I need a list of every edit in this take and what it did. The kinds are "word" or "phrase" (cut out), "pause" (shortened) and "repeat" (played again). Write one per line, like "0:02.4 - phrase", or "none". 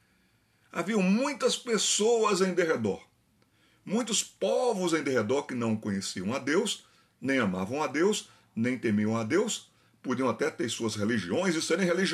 none